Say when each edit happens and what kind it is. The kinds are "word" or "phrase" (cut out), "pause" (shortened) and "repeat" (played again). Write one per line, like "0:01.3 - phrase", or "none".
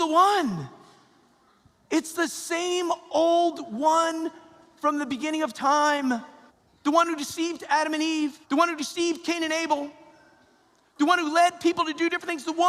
0:06.5 - pause
0:08.4 - pause